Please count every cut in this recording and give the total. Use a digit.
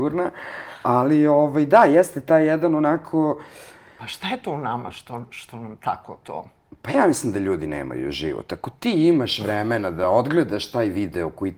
0